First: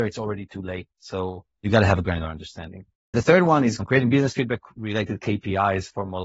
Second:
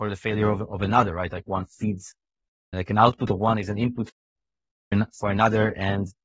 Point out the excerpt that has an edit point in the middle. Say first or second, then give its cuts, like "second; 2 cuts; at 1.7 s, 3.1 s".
first; 2 cuts; at 0.9 s, 2.9 s